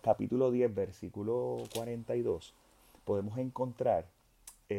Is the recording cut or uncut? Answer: uncut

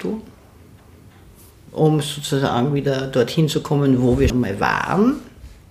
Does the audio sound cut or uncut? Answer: cut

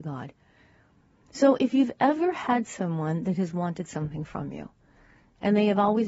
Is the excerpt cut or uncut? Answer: uncut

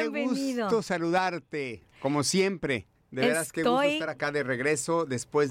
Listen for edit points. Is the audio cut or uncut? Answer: uncut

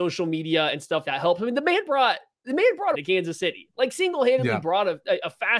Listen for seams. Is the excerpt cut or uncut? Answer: cut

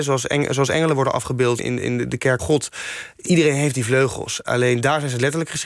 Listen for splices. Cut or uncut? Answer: cut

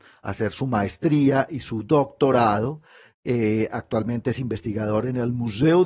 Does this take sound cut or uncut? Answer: uncut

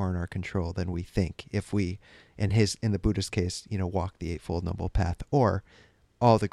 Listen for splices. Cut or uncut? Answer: uncut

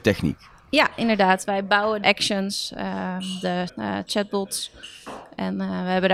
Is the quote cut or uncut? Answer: cut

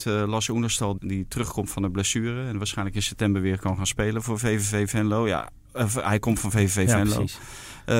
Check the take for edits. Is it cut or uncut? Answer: cut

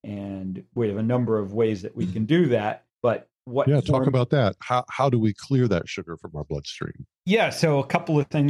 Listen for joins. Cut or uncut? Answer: cut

